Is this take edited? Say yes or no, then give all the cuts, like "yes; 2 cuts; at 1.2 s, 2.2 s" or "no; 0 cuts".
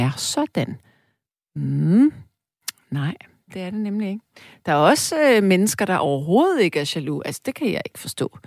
no; 0 cuts